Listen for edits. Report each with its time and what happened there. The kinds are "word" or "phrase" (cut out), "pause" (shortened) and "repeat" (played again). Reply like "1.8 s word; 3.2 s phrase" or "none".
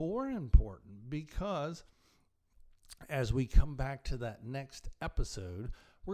none